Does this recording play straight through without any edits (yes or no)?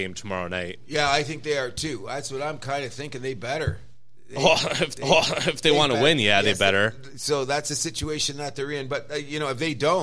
no